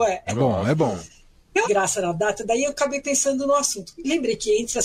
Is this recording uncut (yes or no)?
no